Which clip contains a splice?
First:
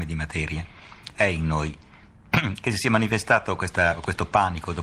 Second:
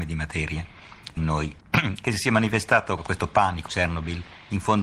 second; 4 cuts; at 1.2 s, 1.6 s, 3.0 s, 3.7 s

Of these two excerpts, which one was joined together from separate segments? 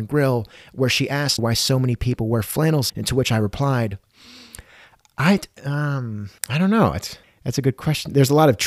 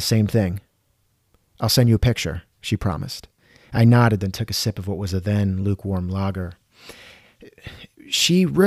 first; 4 cuts; at 1.4 s, 2.9 s, 6.4 s, 7.2 s

